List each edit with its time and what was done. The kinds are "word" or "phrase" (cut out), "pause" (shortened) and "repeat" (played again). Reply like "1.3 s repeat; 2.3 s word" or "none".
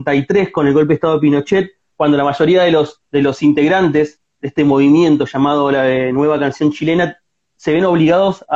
3.1 s pause